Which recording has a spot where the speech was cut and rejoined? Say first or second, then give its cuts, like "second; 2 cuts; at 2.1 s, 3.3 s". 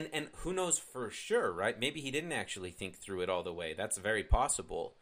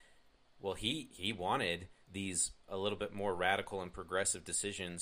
second; 1 cut; at 2.0 s